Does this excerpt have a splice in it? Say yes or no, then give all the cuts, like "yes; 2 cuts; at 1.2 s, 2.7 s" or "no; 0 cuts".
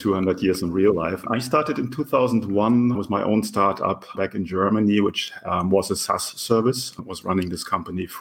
no; 0 cuts